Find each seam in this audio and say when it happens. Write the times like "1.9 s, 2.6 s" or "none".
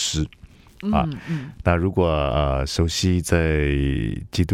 none